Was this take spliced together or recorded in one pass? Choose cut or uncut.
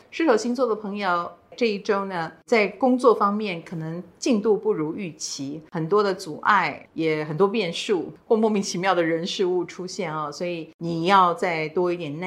uncut